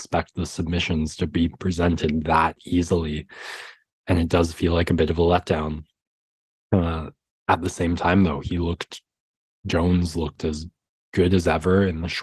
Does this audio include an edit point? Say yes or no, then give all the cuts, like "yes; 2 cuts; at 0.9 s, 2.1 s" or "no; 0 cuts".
no; 0 cuts